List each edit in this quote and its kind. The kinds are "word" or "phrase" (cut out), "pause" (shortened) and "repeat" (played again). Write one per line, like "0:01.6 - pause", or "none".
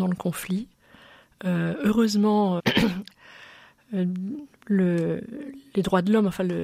0:02.6 - word
0:04.5 - pause